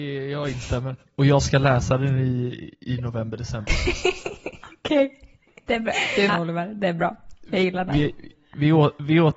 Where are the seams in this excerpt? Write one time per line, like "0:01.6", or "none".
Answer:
0:06.3